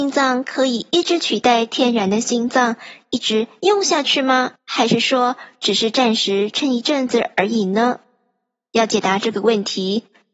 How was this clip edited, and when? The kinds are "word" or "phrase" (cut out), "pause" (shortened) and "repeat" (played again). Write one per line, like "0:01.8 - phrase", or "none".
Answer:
0:04.6 - pause